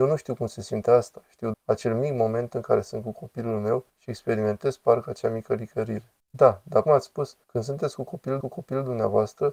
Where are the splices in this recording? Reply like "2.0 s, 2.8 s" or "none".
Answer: 1.5 s, 3.9 s, 6.2 s, 6.8 s, 7.4 s, 8.4 s